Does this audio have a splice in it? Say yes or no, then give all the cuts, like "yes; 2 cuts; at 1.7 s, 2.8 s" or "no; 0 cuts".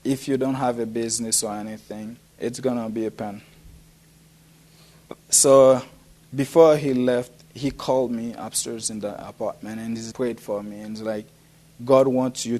yes; 3 cuts; at 2.3 s, 5.2 s, 10.1 s